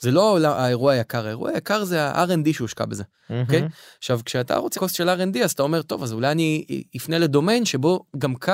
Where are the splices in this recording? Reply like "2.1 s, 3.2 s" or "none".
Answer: 4.7 s